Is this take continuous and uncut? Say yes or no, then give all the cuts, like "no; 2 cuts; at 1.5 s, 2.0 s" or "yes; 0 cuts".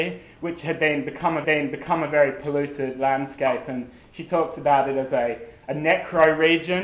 no; 1 cut; at 1.4 s